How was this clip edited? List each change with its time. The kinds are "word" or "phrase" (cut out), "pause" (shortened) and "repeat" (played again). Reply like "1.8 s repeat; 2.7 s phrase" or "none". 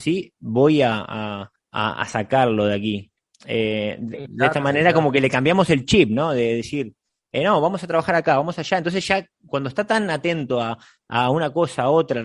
1.6 s pause